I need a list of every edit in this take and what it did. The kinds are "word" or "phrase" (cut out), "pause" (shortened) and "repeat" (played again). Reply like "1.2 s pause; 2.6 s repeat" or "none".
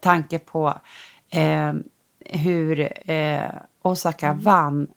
3.0 s pause